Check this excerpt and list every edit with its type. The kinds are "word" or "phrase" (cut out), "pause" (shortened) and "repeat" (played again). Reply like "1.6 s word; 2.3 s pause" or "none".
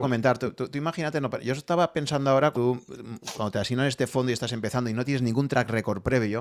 2.5 s word